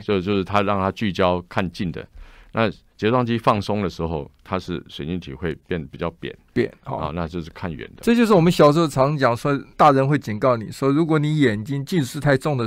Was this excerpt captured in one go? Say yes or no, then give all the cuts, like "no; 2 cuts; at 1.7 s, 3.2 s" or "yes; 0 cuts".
no; 1 cut; at 9.7 s